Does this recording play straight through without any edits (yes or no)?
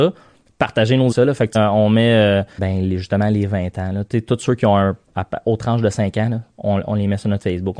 no